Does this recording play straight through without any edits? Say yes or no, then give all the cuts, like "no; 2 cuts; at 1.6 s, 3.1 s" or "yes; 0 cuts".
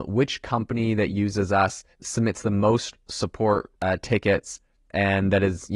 no; 1 cut; at 3.8 s